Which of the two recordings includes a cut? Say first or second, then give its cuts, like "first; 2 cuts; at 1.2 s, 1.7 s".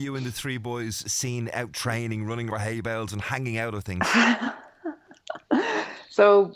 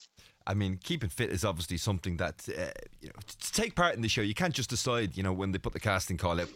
first; 1 cut; at 2.5 s